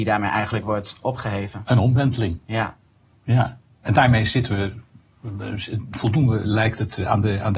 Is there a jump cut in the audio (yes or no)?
no